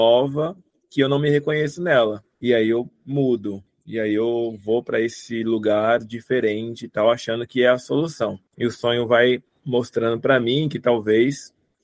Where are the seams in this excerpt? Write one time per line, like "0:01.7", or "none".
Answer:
0:02.3
0:08.5